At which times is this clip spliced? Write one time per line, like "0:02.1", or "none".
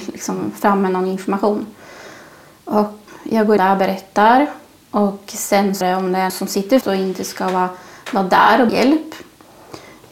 0:03.1
0:03.6
0:05.8
0:06.3
0:06.8
0:08.7